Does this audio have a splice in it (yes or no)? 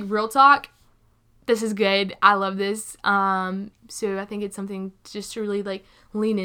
no